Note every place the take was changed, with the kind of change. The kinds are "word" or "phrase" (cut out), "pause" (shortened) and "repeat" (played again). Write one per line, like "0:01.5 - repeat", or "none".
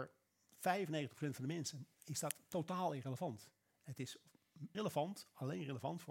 0:01.9 - pause
0:04.7 - word

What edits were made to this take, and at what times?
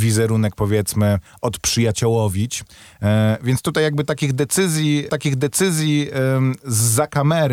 0:05.1 - repeat

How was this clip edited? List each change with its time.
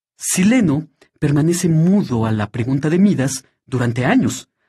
none

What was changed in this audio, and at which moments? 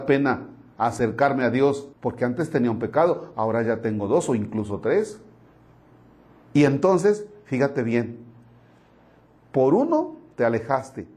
0:01.9 - pause

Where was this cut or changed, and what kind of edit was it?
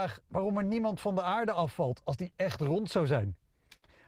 none

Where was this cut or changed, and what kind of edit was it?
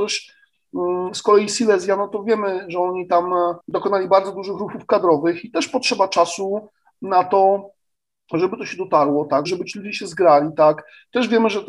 0:03.6 - pause
0:09.5 - word

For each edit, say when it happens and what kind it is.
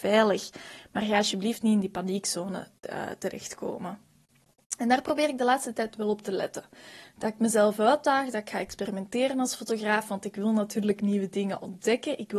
none

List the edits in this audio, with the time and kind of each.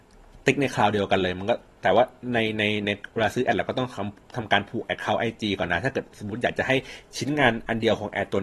none

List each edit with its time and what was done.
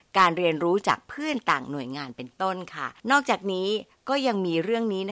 0:03.0 - pause

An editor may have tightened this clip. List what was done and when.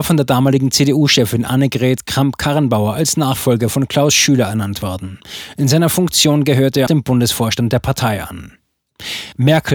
0:06.9 - word

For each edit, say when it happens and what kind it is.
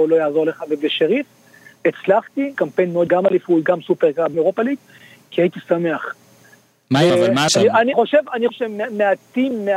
0:02.5 - word
0:03.1 - word
0:04.3 - word
0:07.1 - word
0:07.5 - word
0:07.9 - word
0:08.5 - word

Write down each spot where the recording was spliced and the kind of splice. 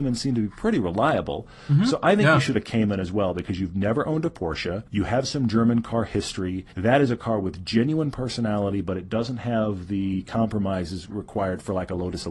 0:02.5 - phrase
0:04.9 - pause
0:06.7 - pause

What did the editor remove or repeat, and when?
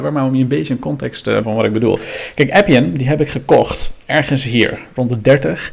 0:01.4 - phrase

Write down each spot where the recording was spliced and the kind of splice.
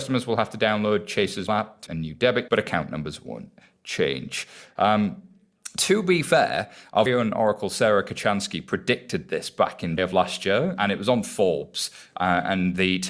0:01.5 - word
0:01.9 - word
0:02.5 - word
0:07.1 - word
0:10.0 - word
0:10.8 - word

